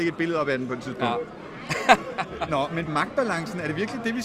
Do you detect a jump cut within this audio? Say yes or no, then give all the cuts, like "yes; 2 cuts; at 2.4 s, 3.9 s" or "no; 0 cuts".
yes; 1 cut; at 2.9 s